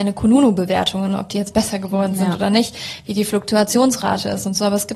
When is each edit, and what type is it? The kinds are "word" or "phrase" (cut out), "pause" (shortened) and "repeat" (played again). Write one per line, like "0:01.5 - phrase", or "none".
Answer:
none

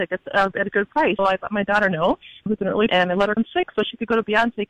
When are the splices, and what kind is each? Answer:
0:01.2 - word
0:02.5 - word
0:02.9 - word
0:03.4 - word

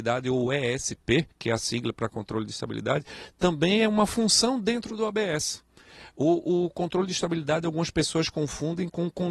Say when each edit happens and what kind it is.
0:01.3 - pause

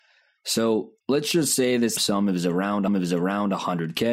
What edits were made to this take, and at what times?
0:01.0 - pause
0:02.0 - word
0:02.9 - repeat

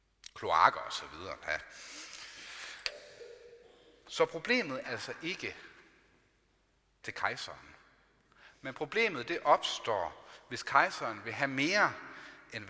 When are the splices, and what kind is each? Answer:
0:01.4 - phrase
0:04.8 - word
0:07.0 - phrase

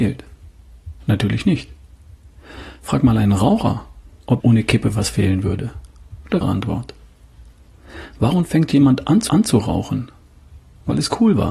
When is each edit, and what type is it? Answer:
0:04.4 - word
0:06.4 - phrase
0:09.3 - repeat

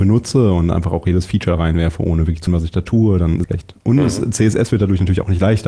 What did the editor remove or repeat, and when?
0:02.5 - word
0:03.4 - phrase

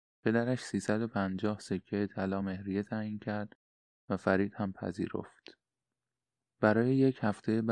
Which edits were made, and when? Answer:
none

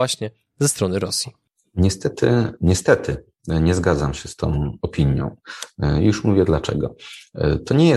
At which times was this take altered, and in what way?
none

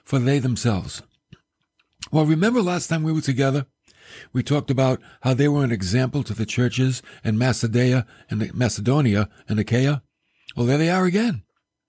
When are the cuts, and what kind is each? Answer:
none

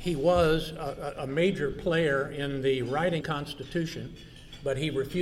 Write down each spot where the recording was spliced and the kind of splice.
0:03.2 - phrase

